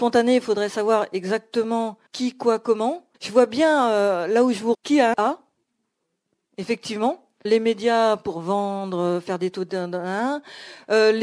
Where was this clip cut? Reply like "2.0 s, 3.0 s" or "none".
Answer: 2.1 s, 3.1 s, 4.7 s, 5.1 s, 7.5 s

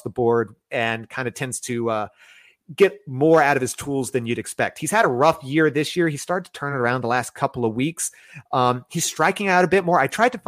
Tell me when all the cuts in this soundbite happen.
none

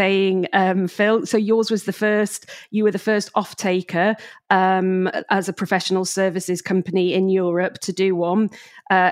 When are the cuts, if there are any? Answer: none

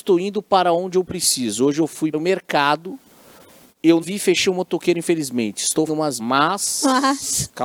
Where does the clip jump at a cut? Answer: 2.1 s, 4.0 s, 5.9 s, 6.2 s

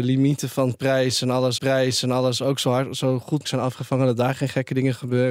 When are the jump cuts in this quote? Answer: 1.6 s, 3.4 s

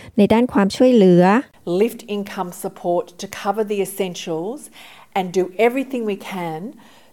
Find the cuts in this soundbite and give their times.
none

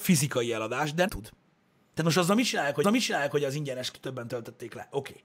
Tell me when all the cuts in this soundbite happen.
1.1 s, 1.5 s, 2.8 s, 3.9 s

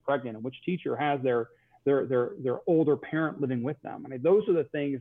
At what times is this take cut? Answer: none

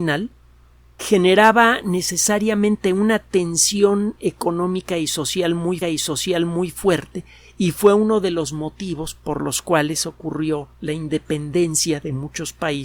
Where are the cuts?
1.0 s, 5.8 s, 10.7 s

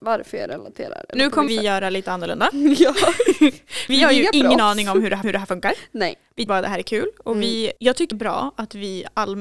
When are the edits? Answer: 1.5 s, 3.9 s, 5.2 s, 6.5 s, 7.8 s, 8.1 s

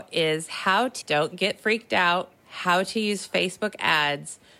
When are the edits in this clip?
1.0 s, 2.4 s

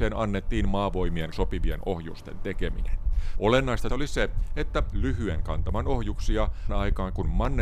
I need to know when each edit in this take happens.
1.3 s, 3.9 s, 4.9 s, 6.7 s

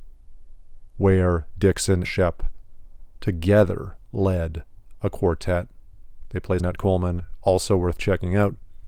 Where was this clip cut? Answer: 2.0 s, 6.6 s

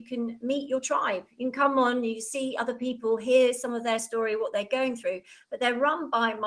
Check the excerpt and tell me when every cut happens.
none

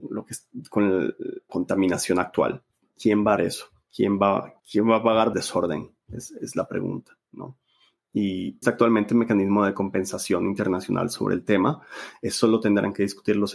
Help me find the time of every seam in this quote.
1.5 s, 2.7 s, 3.4 s, 4.6 s, 5.3 s, 8.6 s

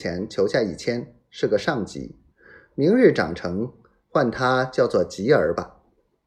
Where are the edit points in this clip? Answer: none

